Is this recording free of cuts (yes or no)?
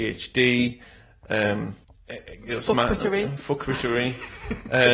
no